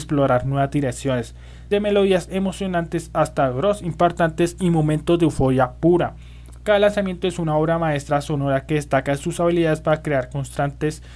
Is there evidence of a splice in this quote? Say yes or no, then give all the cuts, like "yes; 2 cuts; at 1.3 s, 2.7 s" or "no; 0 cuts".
yes; 1 cut; at 1.7 s